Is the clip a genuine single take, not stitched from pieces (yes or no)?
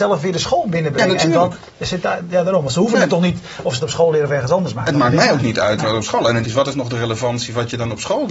no